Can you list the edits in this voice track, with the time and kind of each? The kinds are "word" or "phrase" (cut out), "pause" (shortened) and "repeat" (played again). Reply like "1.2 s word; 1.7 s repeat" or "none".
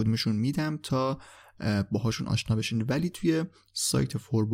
none